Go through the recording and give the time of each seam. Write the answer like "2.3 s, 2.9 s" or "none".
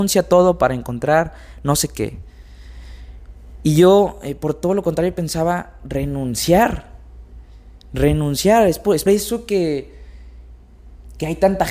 9.1 s